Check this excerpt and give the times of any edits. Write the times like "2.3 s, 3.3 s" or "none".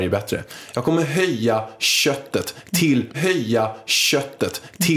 3.1 s